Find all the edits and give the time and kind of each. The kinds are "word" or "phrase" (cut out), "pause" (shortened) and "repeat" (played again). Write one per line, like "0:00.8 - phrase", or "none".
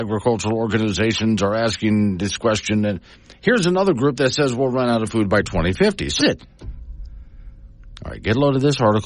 0:03.1 - pause
0:06.2 - phrase